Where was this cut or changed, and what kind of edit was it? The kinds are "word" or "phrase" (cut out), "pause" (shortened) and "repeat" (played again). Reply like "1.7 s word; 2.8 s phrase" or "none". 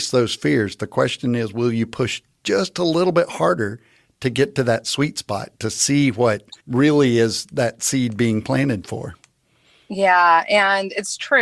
6.6 s pause